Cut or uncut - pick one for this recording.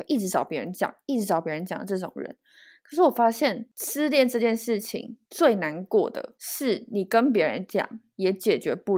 uncut